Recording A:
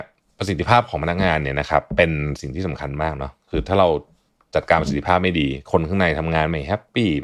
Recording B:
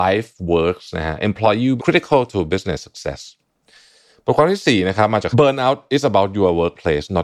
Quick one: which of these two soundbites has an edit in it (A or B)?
B